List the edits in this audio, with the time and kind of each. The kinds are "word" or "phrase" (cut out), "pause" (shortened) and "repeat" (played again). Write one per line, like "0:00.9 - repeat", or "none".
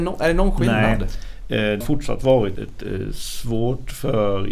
0:01.8 - word
0:02.6 - word

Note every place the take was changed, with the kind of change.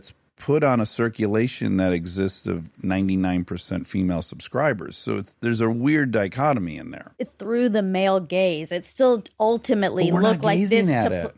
0:07.3 - word

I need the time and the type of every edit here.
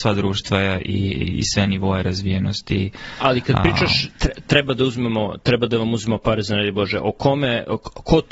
none

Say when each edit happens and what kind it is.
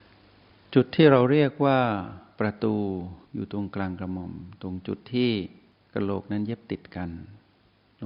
0:03.2 - pause

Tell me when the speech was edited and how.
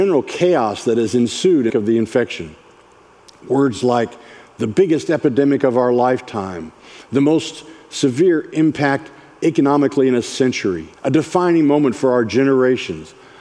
0:01.7 - phrase
0:10.9 - pause

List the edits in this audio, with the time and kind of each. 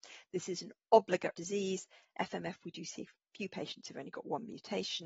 0:01.3 - word

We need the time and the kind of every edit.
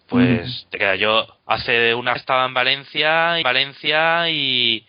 0:01.4 - pause
0:02.2 - word
0:03.4 - repeat

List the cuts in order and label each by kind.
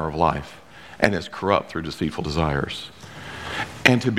none

